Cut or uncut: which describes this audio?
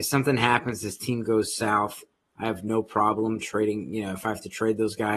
uncut